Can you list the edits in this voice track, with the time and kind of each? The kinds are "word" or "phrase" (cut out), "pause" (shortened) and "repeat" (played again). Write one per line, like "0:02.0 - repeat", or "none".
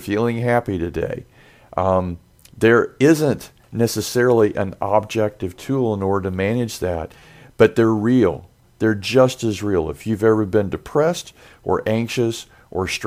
none